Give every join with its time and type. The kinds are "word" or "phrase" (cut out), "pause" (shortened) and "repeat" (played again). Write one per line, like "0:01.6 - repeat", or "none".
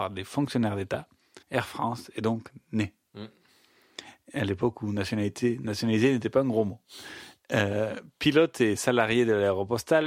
0:01.4 - pause